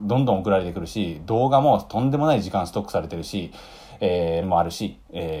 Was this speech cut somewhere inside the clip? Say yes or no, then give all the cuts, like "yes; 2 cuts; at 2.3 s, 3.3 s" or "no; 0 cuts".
yes; 1 cut; at 4.4 s